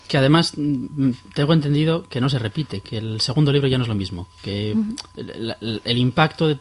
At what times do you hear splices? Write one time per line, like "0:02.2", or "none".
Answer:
none